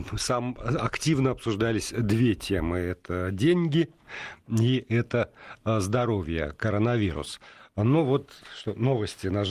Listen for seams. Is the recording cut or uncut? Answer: uncut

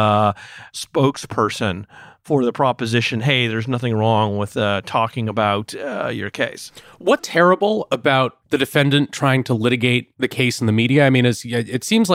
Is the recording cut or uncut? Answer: cut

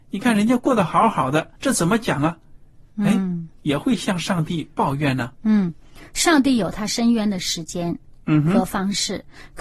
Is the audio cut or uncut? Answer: cut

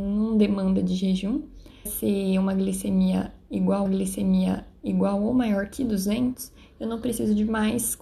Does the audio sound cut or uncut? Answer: cut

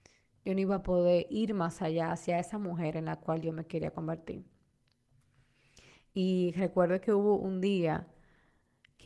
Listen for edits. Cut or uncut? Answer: uncut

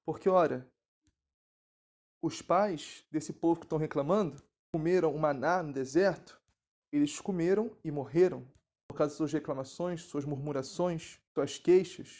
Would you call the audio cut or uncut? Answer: uncut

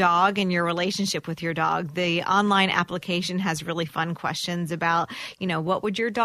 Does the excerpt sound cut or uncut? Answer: uncut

